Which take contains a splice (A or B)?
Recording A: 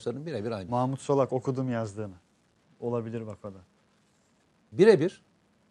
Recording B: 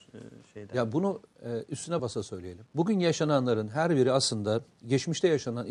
B